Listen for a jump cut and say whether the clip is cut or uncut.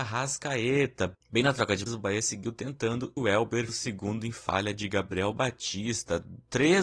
cut